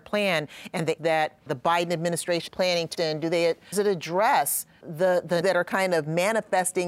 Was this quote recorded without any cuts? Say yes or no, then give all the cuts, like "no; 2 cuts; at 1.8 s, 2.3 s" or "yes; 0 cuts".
no; 7 cuts; at 1.0 s, 1.5 s, 2.5 s, 2.9 s, 3.7 s, 4.8 s, 5.4 s